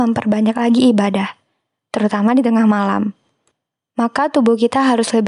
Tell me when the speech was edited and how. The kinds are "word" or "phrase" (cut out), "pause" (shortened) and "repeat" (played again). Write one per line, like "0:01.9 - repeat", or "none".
none